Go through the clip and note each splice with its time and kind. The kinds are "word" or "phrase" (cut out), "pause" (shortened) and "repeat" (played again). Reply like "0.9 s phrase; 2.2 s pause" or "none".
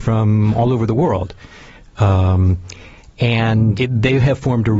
3.8 s word